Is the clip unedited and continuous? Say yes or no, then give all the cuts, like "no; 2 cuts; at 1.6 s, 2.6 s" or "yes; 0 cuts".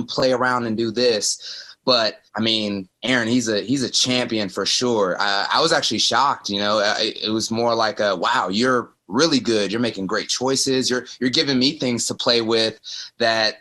no; 3 cuts; at 2.3 s, 3.0 s, 9.0 s